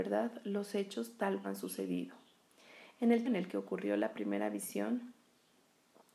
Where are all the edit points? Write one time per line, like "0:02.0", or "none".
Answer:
0:01.4
0:03.2